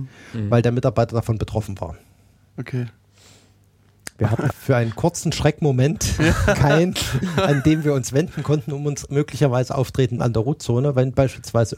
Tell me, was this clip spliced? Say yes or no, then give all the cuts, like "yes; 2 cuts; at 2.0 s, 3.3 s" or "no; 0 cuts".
yes; 2 cuts; at 4.5 s, 10.2 s